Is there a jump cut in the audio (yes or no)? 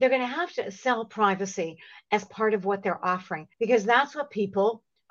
yes